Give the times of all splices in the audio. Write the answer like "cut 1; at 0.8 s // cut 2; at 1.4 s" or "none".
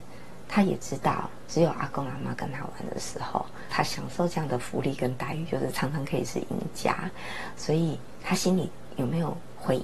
cut 1; at 3.7 s